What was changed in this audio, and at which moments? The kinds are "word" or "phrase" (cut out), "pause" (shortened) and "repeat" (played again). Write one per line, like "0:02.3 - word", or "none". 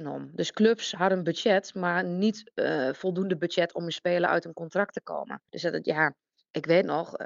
0:05.5 - pause